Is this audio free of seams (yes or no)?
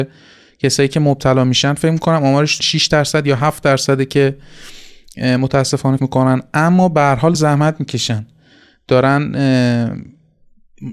no